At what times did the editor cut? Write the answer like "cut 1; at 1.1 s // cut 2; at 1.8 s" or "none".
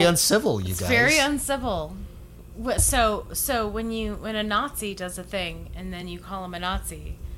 none